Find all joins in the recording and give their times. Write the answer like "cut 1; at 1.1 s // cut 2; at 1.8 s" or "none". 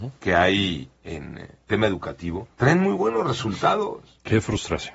cut 1; at 2.5 s